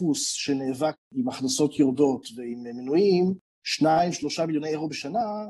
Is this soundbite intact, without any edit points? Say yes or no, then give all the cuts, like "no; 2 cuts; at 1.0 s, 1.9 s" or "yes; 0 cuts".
yes; 0 cuts